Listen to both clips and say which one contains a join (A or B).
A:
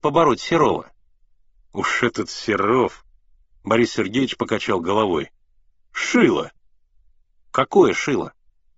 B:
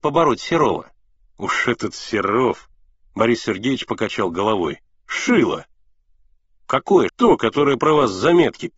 B